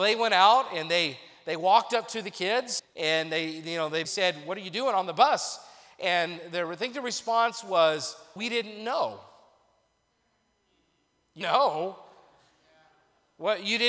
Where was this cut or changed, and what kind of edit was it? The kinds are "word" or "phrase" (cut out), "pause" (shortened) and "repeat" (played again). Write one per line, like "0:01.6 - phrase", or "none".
0:02.8 - word
0:04.0 - word
0:08.4 - word
0:11.4 - word